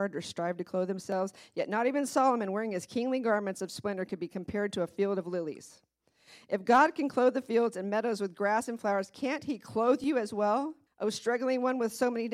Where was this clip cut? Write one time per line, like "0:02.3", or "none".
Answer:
0:10.9